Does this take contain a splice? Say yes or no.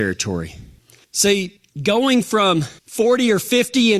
yes